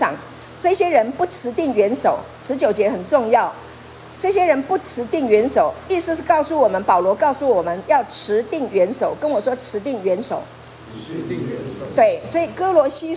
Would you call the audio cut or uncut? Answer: uncut